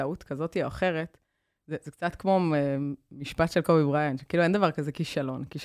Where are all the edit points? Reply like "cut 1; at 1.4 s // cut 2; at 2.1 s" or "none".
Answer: none